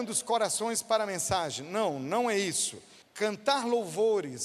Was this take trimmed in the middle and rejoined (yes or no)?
yes